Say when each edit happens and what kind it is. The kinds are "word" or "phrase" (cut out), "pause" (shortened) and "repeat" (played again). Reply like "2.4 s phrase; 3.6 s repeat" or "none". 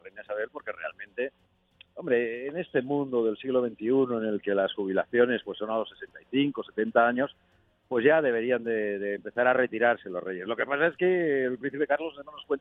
none